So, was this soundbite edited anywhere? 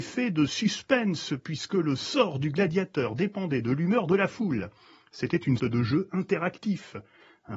yes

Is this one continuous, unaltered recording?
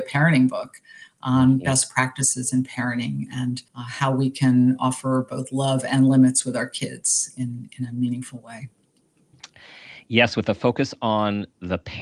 no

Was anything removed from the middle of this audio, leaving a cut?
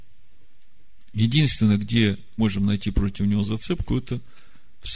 yes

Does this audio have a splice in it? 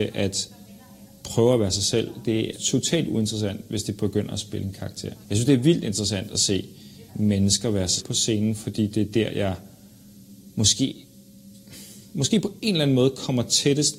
yes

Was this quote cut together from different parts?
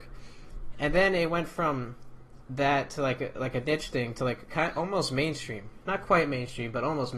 no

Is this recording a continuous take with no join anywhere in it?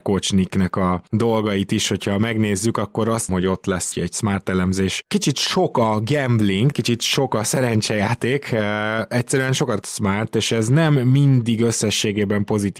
no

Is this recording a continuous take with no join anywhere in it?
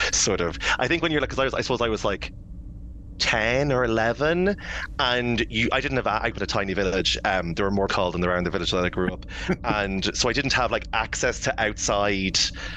no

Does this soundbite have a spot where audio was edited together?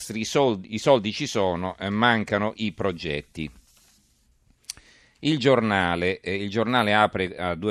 no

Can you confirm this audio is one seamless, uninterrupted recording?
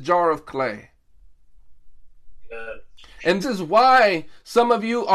no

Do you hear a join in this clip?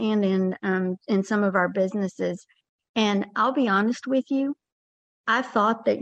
no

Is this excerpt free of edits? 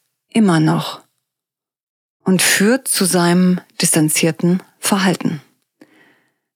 yes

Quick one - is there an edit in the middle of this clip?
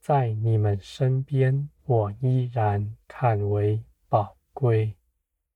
yes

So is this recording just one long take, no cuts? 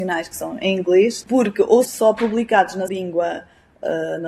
no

